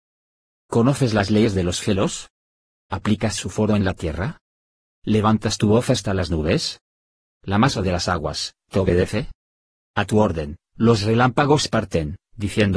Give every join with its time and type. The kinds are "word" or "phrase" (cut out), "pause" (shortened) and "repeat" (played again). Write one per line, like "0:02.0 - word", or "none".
none